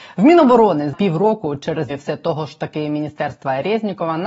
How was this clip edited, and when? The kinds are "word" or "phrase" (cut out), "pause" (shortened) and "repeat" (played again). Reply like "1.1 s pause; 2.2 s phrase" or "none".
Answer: 0.9 s phrase; 1.9 s phrase